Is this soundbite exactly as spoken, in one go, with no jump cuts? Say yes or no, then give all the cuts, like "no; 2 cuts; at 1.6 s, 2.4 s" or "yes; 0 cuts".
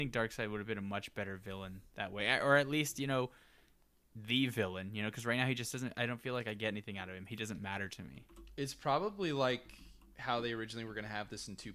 yes; 0 cuts